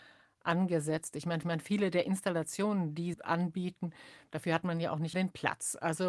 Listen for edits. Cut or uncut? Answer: cut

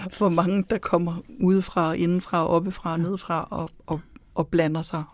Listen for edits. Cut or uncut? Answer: uncut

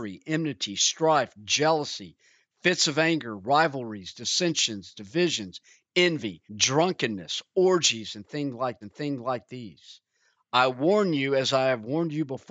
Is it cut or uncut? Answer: cut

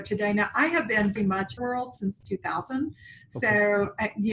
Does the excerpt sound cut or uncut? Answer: cut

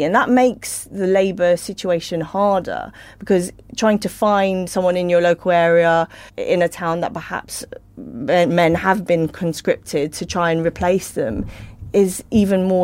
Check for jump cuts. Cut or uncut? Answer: uncut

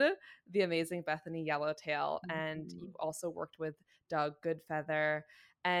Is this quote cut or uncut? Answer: uncut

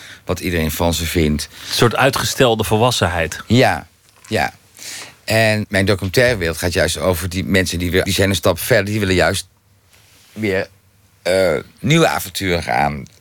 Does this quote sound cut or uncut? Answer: cut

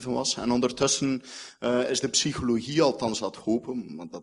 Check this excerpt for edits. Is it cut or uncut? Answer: uncut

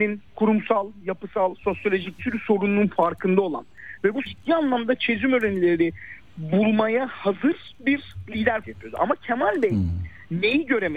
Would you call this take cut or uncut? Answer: cut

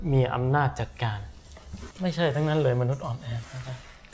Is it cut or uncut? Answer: cut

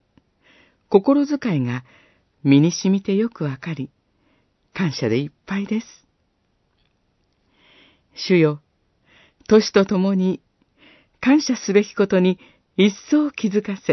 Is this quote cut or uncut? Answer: uncut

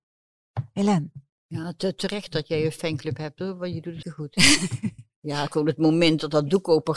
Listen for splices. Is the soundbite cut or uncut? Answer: cut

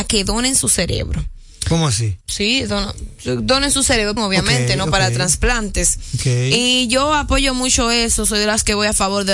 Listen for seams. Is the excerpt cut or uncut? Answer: cut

